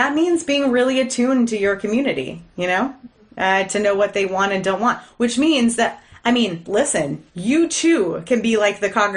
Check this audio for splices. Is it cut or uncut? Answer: cut